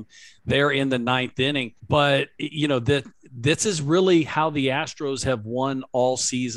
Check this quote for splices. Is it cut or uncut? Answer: cut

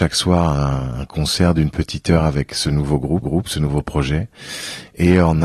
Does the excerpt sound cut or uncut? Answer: cut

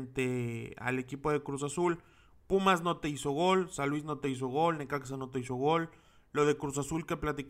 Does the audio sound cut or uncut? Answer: uncut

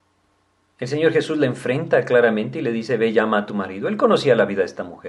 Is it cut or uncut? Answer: uncut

